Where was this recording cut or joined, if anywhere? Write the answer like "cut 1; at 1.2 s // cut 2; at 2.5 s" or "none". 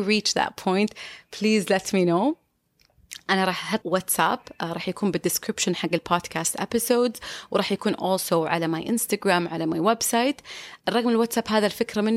cut 1; at 3.8 s // cut 2; at 10.8 s